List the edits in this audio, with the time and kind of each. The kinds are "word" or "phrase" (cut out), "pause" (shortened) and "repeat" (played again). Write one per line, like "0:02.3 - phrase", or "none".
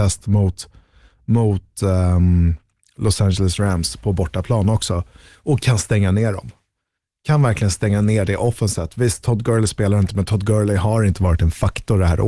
none